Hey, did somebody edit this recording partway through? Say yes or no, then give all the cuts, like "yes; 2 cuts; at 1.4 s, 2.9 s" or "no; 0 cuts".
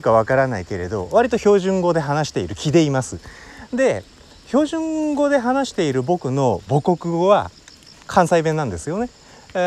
no; 0 cuts